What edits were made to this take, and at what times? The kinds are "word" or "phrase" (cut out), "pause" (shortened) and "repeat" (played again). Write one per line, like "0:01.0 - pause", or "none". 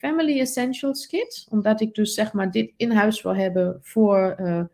none